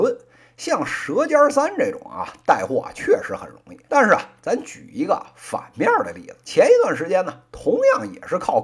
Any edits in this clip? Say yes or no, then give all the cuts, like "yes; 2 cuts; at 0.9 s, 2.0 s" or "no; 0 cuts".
yes; 2 cuts; at 3.9 s, 6.4 s